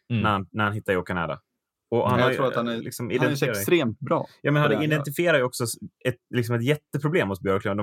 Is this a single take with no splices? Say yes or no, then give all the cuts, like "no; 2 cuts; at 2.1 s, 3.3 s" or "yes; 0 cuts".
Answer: yes; 0 cuts